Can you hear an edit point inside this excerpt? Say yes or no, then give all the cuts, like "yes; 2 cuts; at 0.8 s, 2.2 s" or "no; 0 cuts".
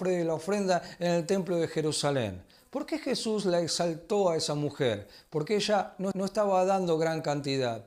yes; 1 cut; at 6.1 s